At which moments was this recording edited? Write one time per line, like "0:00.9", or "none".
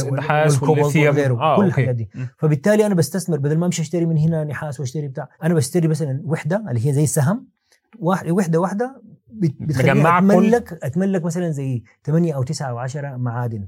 0:05.3